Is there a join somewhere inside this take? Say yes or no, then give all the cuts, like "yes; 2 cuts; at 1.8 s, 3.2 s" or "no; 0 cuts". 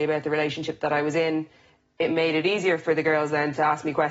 yes; 1 cut; at 2.1 s